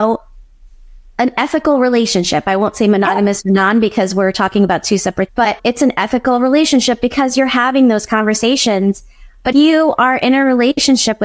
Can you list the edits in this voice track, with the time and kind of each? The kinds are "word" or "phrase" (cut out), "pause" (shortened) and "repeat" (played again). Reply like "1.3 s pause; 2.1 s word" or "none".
5.3 s word; 5.6 s word; 9.5 s word